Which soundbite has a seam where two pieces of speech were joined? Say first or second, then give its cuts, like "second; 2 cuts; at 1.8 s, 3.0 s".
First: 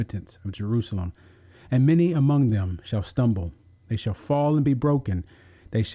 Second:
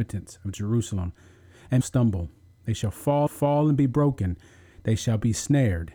second; 2 cuts; at 1.8 s, 3.3 s